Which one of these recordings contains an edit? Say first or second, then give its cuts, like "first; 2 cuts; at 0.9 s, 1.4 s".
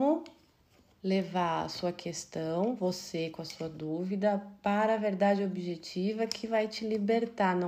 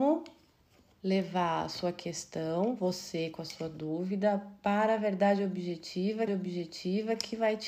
second; 1 cut; at 6.3 s